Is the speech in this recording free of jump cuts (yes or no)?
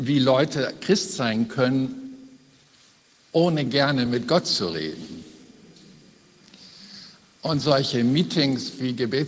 yes